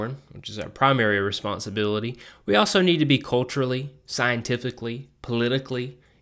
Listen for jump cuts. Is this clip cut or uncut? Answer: uncut